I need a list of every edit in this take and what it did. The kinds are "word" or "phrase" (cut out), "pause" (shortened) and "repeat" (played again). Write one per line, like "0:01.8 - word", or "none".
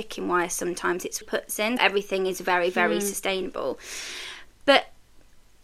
0:01.2 - phrase
0:01.8 - word